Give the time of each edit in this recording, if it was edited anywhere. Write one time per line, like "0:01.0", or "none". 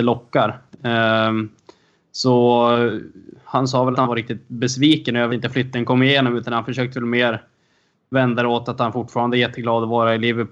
0:03.9
0:05.3